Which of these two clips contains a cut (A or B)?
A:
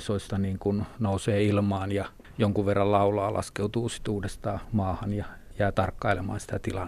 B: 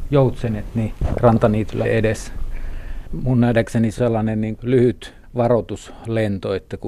B